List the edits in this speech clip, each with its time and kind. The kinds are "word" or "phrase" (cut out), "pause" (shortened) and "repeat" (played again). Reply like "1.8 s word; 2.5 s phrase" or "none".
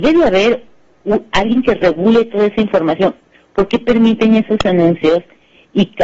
none